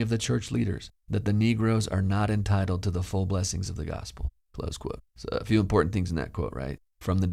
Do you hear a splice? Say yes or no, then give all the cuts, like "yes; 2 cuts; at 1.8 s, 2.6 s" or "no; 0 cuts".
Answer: yes; 1 cut; at 5.1 s